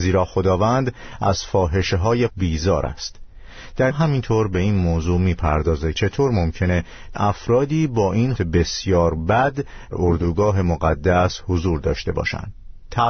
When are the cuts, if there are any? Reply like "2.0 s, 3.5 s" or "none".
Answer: 2.3 s, 3.9 s, 5.9 s, 7.1 s, 8.4 s, 9.9 s